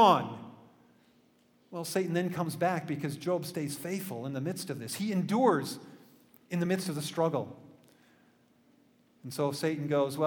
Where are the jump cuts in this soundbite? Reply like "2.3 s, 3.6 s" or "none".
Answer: none